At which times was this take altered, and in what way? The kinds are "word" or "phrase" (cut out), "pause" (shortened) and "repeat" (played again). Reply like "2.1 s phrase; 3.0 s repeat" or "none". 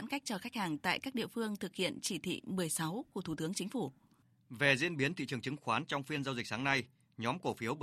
none